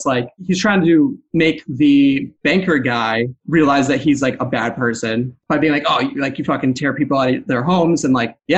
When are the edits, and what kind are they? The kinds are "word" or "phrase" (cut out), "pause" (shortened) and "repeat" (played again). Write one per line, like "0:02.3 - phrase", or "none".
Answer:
0:02.3 - pause